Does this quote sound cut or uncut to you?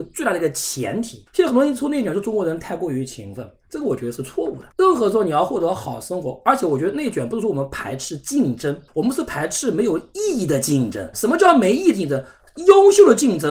cut